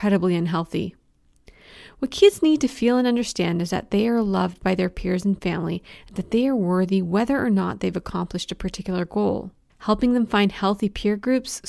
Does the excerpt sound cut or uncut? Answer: cut